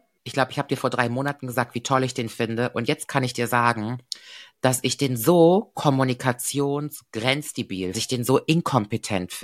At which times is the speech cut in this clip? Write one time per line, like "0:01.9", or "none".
0:07.9